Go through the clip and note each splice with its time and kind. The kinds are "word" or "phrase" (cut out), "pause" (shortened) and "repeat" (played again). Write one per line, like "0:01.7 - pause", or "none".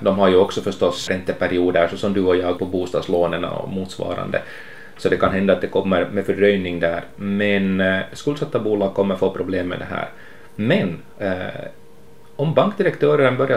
0:01.1 - word
0:02.6 - word